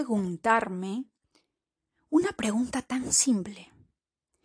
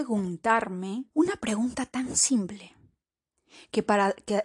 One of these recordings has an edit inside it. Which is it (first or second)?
second